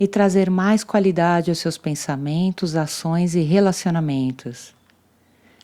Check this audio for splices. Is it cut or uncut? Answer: uncut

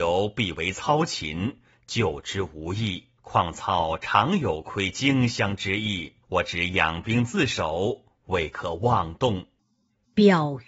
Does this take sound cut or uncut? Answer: cut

